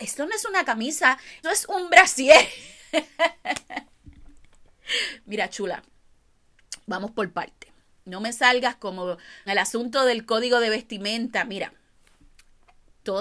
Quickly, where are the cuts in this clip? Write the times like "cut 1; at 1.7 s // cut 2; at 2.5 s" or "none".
cut 1; at 1.4 s // cut 2; at 9.5 s